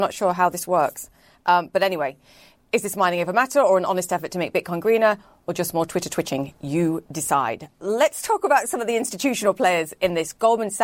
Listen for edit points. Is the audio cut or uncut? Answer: uncut